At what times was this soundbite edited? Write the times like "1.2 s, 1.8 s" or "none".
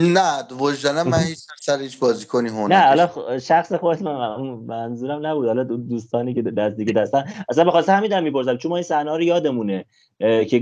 none